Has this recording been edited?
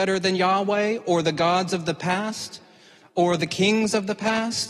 no; 0 cuts

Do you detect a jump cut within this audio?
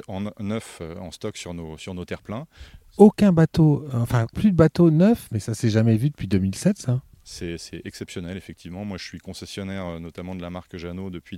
yes; 1 cut; at 4.3 s

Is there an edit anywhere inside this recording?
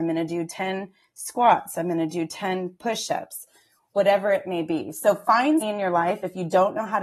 yes; 1 cut; at 5.6 s

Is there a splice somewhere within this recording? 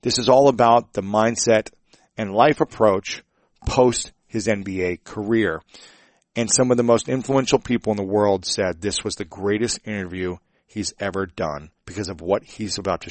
yes; 1 cut; at 11.8 s

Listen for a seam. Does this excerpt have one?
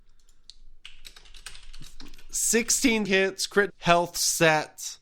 yes; 2 cuts; at 3.1 s, 3.7 s

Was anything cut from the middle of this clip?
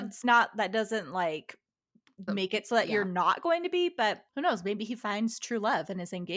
yes; 2 cuts; at 2.3 s, 4.3 s

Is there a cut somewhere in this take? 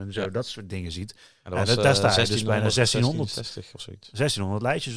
no; 0 cuts

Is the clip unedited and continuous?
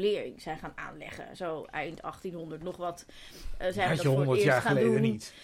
yes; 0 cuts

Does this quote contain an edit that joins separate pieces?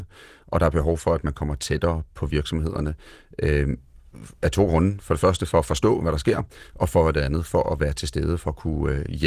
no; 0 cuts

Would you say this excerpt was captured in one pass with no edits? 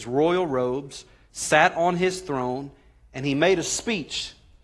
yes; 0 cuts

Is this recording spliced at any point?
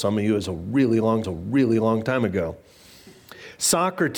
yes; 1 cut; at 1.2 s

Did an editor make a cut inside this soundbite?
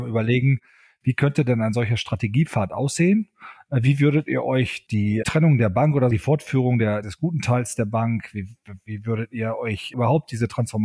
yes; 2 cuts; at 5.2 s, 7.0 s

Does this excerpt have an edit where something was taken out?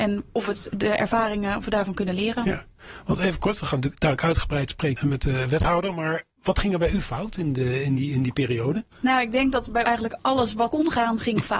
yes; 3 cuts; at 8.9 s, 9.8 s, 10.7 s

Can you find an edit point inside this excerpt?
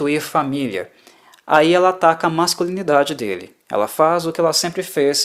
no; 0 cuts

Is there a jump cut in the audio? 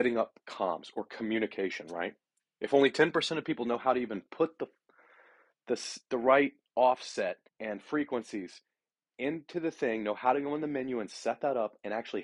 yes; 2 cuts; at 6.0 s, 7.5 s

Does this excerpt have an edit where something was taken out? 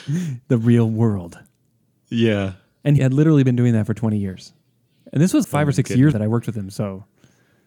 yes; 3 cuts; at 3.0 s, 5.4 s, 6.1 s

